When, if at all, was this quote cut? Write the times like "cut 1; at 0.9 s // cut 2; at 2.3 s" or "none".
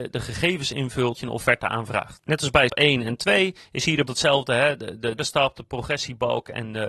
cut 1; at 1.1 s // cut 2; at 2.7 s // cut 3; at 4.1 s // cut 4; at 5.2 s